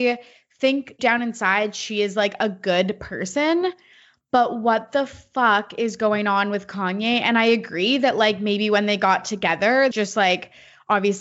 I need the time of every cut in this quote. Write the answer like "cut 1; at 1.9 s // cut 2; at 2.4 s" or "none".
cut 1; at 1.0 s // cut 2; at 9.9 s